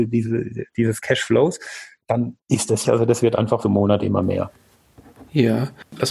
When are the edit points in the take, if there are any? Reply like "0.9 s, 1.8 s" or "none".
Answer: 2.4 s, 2.8 s, 3.6 s